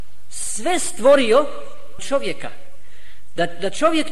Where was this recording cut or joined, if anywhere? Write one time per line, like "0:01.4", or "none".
0:02.0